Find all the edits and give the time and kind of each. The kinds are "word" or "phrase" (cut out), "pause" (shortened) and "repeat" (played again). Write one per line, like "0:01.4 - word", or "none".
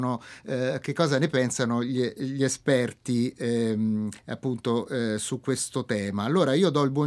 0:04.2 - pause